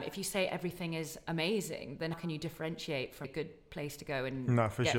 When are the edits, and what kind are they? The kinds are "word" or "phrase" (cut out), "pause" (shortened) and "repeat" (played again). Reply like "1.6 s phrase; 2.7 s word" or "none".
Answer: 2.1 s word; 3.2 s word